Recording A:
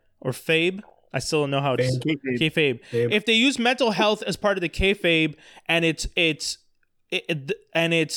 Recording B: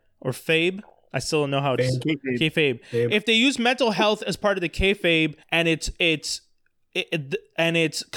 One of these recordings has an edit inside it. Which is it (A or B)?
B